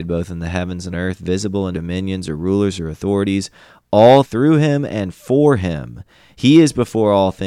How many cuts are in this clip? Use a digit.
3